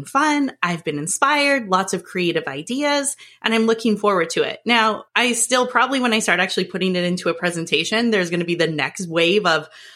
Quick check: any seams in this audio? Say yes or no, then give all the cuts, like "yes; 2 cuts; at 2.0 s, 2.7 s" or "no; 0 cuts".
yes; 1 cut; at 5.1 s